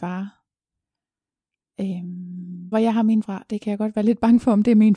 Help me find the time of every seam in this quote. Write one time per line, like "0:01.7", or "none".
0:02.7
0:03.2